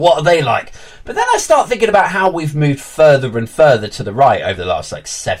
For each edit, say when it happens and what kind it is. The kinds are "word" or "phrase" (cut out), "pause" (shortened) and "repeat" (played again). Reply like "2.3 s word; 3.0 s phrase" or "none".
none